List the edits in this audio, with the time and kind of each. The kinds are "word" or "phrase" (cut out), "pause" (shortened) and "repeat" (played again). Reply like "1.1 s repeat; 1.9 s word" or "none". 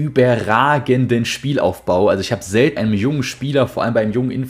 2.8 s word